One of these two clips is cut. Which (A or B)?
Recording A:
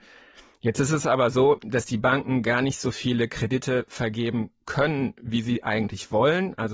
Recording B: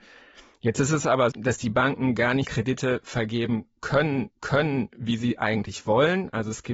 B